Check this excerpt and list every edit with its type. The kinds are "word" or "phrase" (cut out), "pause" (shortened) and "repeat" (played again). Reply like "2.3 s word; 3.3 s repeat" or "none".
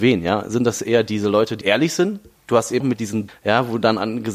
1.6 s word; 2.8 s word; 3.3 s word